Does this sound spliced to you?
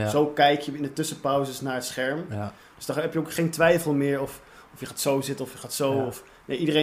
no; 0 cuts

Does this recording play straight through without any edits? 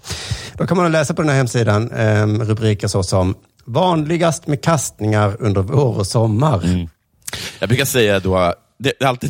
yes; 0 cuts

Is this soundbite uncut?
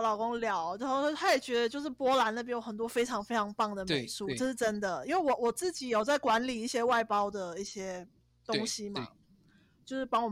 yes; 0 cuts

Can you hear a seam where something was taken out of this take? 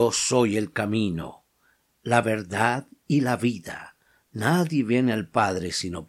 no; 0 cuts

